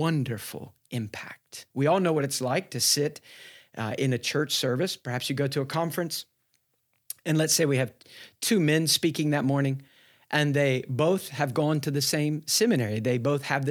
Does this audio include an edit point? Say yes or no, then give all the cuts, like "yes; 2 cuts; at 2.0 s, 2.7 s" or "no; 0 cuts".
yes; 1 cut; at 1.7 s